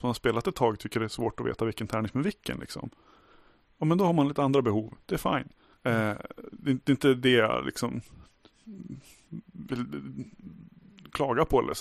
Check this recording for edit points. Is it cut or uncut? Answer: cut